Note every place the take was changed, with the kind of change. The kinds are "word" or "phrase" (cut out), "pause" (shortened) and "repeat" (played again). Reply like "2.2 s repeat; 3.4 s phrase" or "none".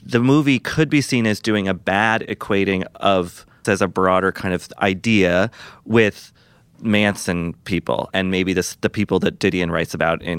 3.6 s word; 8.1 s word